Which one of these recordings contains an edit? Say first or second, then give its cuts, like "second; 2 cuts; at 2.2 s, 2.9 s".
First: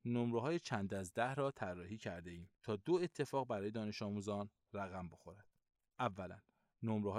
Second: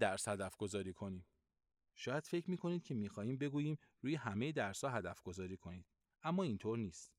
first; 1 cut; at 2.5 s